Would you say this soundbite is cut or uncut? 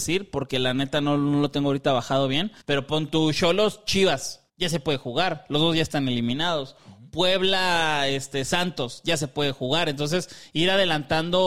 cut